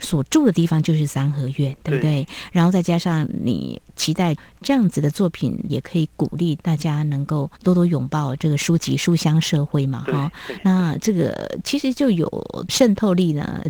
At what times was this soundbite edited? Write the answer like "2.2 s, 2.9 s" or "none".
3.9 s, 7.6 s

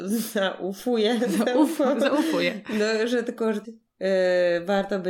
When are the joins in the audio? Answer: 3.6 s

